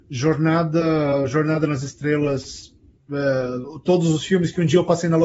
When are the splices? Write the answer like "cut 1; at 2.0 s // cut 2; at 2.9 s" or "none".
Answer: none